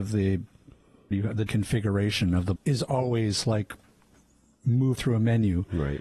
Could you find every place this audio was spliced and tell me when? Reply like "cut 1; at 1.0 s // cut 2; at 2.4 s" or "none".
cut 1; at 1.1 s // cut 2; at 1.5 s // cut 3; at 2.6 s // cut 4; at 5.0 s